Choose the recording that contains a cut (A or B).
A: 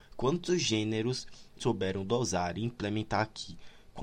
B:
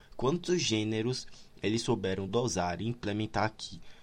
A